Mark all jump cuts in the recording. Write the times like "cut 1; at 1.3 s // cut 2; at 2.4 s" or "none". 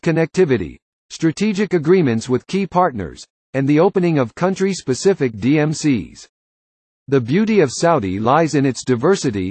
none